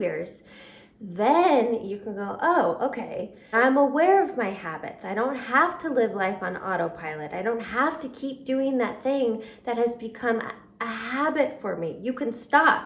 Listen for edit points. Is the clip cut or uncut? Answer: cut